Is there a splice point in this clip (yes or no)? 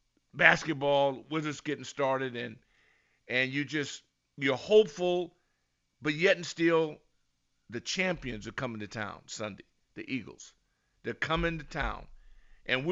no